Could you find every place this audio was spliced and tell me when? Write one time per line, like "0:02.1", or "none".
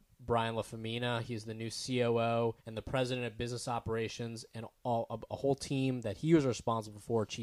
0:02.6